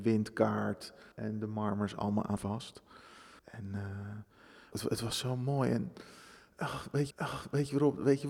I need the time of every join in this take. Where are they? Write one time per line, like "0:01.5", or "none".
0:01.1
0:02.4
0:03.4
0:04.7
0:07.1